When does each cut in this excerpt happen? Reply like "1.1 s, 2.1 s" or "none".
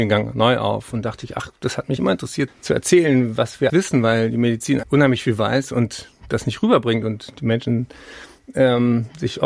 2.0 s, 2.5 s, 3.7 s, 4.8 s

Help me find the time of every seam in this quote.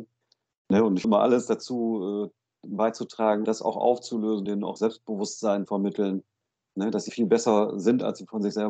1.0 s, 3.5 s, 4.5 s, 5.7 s, 7.1 s

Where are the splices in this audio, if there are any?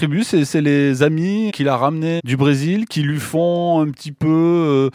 1.5 s, 2.2 s

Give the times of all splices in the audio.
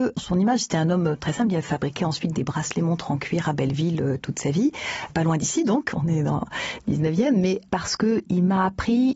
2.3 s

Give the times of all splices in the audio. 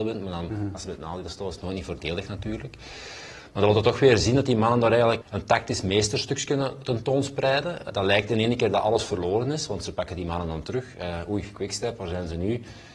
5.2 s, 7.9 s

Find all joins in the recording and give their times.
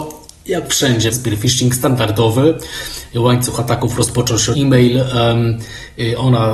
1.1 s, 4.5 s

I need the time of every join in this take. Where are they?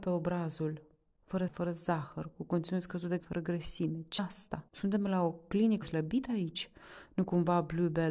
1.5 s, 3.2 s, 4.2 s, 4.7 s, 5.8 s

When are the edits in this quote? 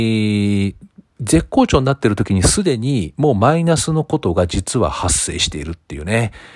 1.1 s

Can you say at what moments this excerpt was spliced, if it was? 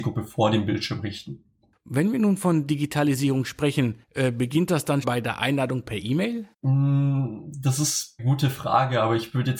4.0 s, 5.0 s, 6.5 s, 8.2 s

